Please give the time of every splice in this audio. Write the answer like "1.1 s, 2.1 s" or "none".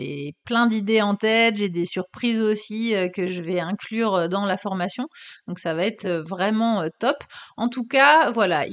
none